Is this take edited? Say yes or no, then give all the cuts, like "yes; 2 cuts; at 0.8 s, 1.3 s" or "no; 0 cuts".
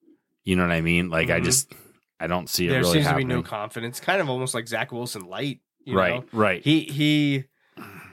no; 0 cuts